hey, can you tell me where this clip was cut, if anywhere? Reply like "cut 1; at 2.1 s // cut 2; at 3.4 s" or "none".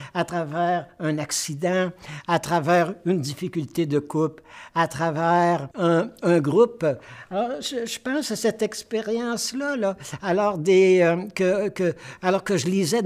cut 1; at 5.7 s